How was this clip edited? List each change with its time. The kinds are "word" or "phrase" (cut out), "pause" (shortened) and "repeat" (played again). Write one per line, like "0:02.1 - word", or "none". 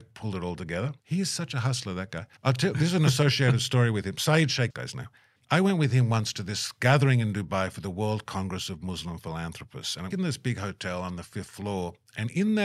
0:01.0 - pause
0:02.4 - pause
0:04.7 - phrase
0:05.4 - pause
0:10.1 - phrase